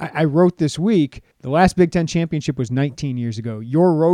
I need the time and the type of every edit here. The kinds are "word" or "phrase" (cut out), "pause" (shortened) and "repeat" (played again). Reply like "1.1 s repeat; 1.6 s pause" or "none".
1.3 s pause